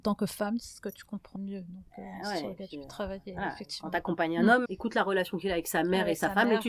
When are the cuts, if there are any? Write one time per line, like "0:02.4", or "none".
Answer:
0:01.4
0:04.7